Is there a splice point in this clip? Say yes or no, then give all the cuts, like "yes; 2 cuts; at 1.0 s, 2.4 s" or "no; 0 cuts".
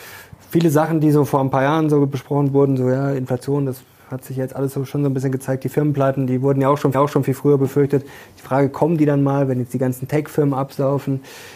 yes; 1 cut; at 6.9 s